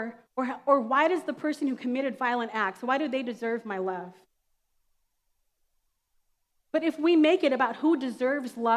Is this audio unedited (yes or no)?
yes